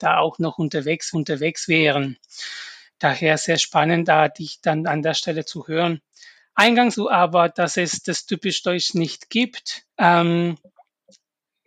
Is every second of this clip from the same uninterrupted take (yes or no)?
no